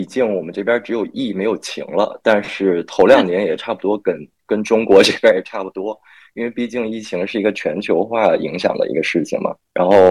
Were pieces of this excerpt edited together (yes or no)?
no